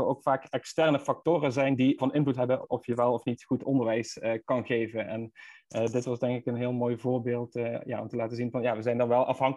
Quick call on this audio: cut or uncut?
cut